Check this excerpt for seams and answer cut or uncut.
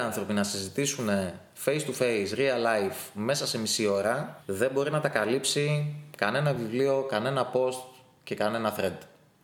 uncut